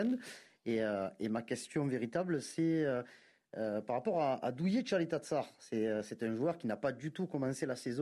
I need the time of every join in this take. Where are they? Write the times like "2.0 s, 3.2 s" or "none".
none